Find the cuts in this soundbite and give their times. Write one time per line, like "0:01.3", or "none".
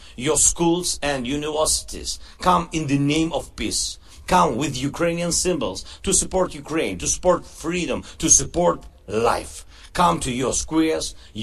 none